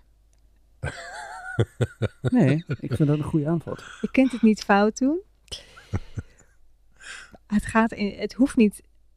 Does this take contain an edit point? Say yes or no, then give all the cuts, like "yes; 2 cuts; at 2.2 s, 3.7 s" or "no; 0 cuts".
no; 0 cuts